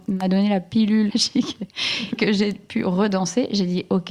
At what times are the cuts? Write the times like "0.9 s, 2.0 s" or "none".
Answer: 1.1 s, 2.2 s